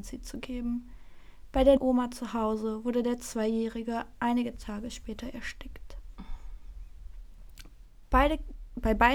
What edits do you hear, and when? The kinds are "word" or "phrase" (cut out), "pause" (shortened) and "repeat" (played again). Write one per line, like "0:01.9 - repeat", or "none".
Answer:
0:01.8 - word